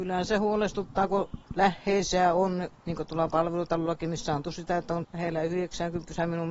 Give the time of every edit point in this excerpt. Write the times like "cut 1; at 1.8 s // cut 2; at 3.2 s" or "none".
cut 1; at 1.4 s // cut 2; at 4.4 s // cut 3; at 5.0 s

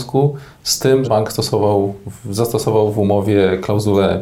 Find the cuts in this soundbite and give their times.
cut 1; at 1.0 s

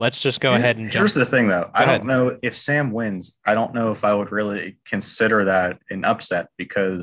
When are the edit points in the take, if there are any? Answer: none

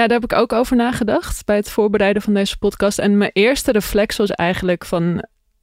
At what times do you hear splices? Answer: none

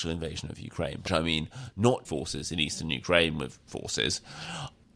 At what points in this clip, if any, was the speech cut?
cut 1; at 1.1 s // cut 2; at 2.0 s // cut 3; at 3.7 s

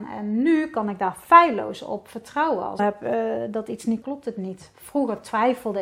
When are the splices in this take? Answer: cut 1; at 2.8 s // cut 2; at 4.0 s

